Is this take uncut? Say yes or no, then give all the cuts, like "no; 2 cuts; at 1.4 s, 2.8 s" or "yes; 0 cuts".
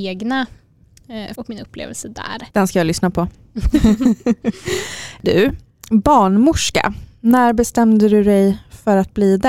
no; 3 cuts; at 1.3 s, 2.5 s, 5.2 s